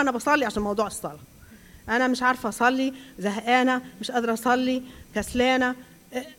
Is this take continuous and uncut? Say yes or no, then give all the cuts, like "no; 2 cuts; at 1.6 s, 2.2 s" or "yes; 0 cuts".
yes; 0 cuts